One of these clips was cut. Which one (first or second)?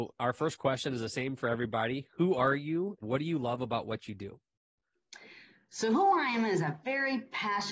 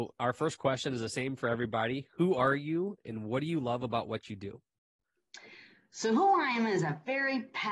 first